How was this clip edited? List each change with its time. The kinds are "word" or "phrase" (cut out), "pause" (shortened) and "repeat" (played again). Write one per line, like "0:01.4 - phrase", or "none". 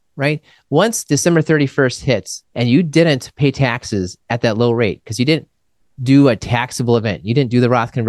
0:02.5 - pause